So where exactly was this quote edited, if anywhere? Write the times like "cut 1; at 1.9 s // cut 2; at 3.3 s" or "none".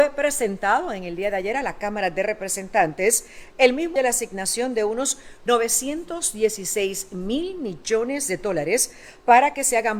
cut 1; at 4.0 s